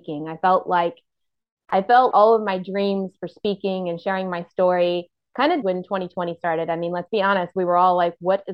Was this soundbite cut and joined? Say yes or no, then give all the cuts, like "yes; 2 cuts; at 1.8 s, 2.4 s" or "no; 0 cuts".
yes; 2 cuts; at 2.1 s, 5.6 s